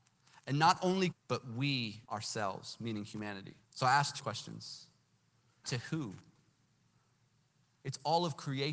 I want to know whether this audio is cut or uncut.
cut